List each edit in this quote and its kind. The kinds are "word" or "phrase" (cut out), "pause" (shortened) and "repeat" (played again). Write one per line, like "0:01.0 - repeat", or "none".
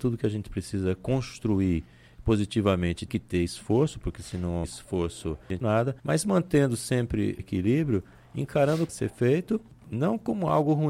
0:03.1 - word
0:04.6 - word
0:05.6 - phrase
0:06.0 - pause
0:07.4 - word
0:08.9 - phrase